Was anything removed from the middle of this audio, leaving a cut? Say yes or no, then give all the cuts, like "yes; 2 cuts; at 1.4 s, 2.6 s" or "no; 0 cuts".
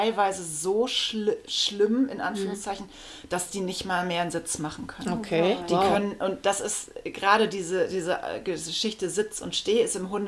no; 0 cuts